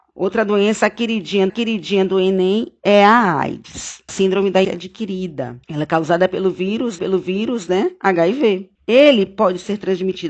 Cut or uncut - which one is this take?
cut